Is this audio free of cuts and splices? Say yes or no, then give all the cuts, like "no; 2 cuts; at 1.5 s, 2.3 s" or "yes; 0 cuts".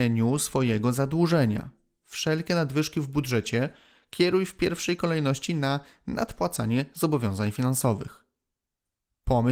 yes; 0 cuts